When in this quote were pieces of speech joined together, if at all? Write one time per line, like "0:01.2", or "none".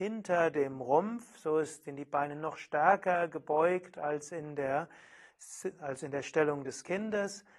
none